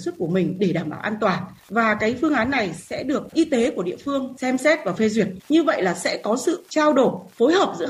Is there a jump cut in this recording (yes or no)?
yes